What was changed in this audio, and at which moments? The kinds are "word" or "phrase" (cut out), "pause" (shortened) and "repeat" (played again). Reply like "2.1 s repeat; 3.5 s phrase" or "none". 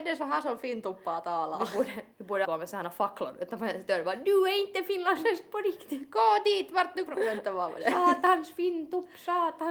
2.1 s pause; 2.4 s word; 7.1 s word